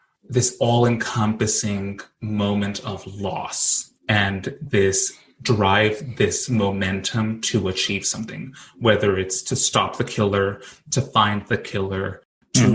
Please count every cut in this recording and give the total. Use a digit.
1